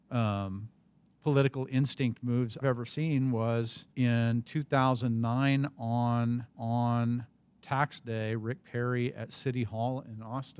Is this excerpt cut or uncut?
cut